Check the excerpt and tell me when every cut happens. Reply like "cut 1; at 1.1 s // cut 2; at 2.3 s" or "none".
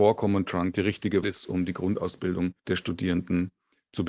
cut 1; at 1.2 s // cut 2; at 2.6 s